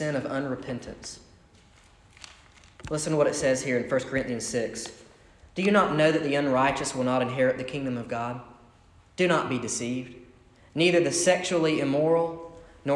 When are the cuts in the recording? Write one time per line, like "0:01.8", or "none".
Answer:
none